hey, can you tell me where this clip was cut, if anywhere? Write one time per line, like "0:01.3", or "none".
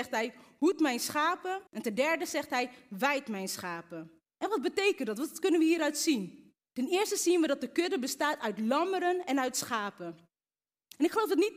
0:01.7
0:04.2
0:06.6